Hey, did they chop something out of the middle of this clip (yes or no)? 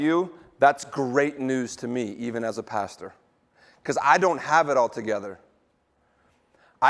no